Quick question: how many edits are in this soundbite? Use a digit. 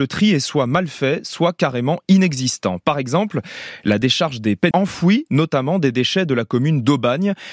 1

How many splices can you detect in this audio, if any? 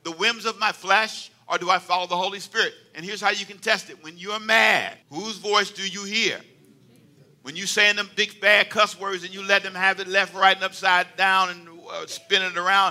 1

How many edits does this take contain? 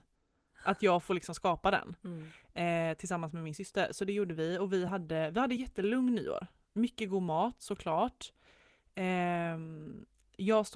0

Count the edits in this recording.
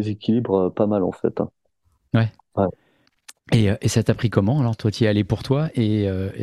0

